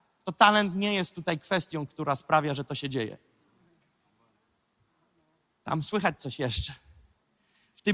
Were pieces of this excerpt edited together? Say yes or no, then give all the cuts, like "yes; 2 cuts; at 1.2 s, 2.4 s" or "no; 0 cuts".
no; 0 cuts